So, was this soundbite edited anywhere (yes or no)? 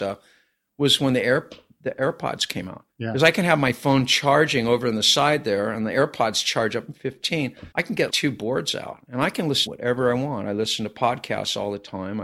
yes